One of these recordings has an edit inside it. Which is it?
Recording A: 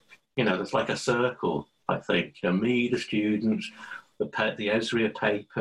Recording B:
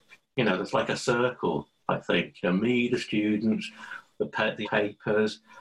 B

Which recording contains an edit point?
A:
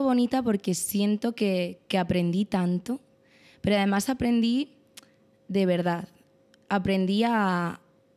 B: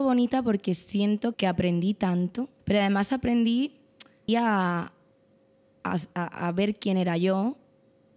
B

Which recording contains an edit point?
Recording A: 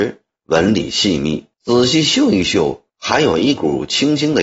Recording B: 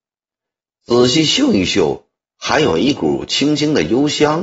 A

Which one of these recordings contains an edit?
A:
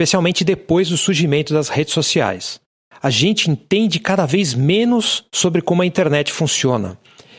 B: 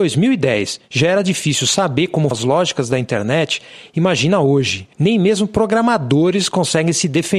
B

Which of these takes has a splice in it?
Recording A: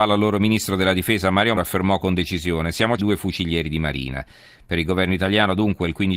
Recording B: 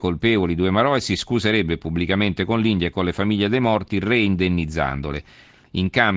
A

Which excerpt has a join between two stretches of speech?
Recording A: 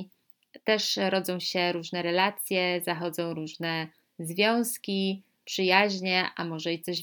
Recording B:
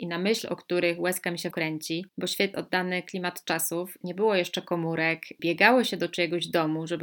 B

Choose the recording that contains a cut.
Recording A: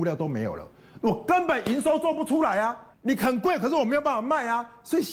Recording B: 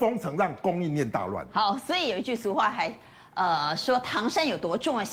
A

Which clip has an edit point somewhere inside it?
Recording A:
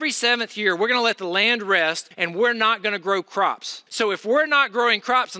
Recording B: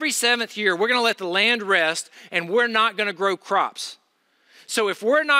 A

